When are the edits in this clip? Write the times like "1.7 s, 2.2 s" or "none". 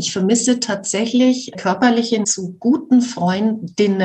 1.5 s, 2.2 s